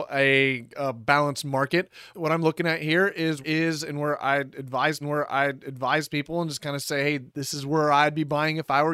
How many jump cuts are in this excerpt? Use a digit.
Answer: 4